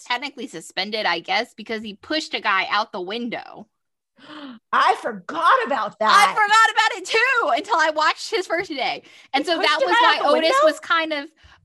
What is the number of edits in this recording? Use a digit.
1